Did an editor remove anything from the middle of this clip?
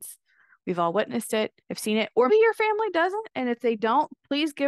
yes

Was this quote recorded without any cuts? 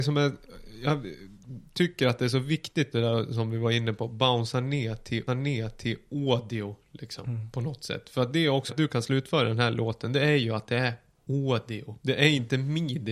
no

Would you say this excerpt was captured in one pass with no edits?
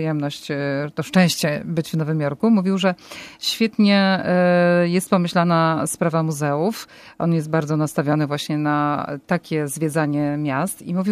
yes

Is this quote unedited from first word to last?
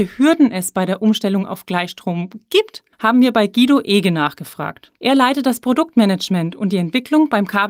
no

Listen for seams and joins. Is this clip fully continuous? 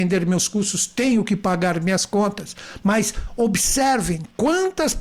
yes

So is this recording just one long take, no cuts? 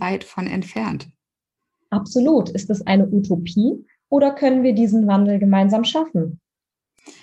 yes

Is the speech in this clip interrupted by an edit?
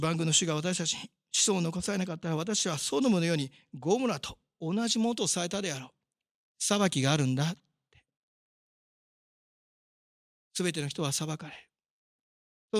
no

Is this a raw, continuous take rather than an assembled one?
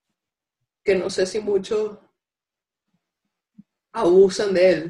yes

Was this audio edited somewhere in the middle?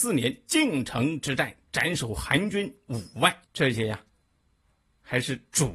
yes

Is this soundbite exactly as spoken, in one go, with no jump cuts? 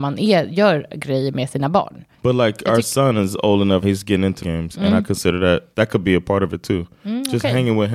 no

